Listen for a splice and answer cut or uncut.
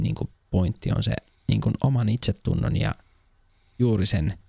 uncut